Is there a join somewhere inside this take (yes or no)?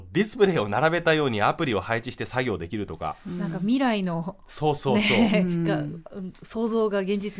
no